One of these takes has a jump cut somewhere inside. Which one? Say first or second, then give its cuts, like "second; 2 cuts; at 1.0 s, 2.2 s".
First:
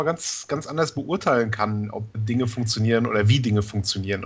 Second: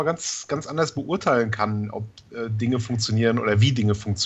first; 1 cut; at 2.1 s